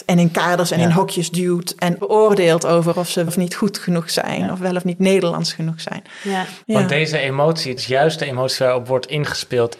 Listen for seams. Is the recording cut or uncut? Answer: cut